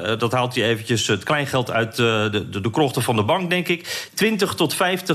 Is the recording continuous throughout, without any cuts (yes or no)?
yes